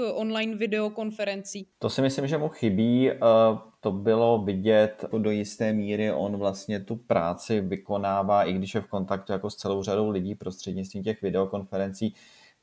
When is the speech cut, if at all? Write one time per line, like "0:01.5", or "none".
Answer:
0:01.7